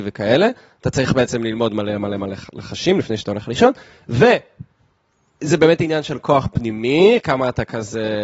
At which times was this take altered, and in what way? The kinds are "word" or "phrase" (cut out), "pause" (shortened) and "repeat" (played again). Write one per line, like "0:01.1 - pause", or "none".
none